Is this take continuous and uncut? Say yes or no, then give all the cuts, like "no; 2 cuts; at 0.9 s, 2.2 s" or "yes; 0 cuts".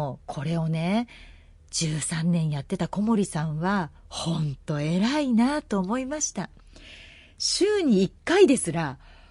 yes; 0 cuts